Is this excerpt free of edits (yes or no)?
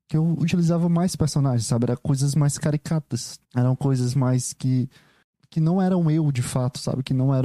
no